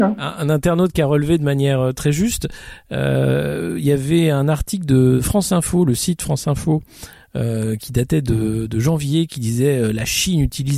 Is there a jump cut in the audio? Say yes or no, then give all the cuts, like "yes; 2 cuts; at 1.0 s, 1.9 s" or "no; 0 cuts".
no; 0 cuts